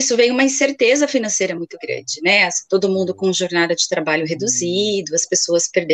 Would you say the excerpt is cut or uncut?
uncut